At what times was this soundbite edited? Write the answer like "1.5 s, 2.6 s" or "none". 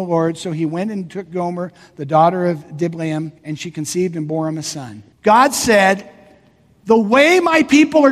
3.4 s, 5.1 s